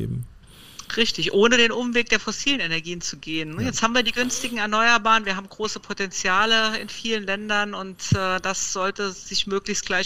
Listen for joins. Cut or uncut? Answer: uncut